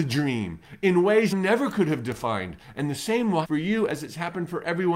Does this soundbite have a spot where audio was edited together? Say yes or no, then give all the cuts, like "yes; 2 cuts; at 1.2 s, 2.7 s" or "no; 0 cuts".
yes; 2 cuts; at 1.3 s, 3.4 s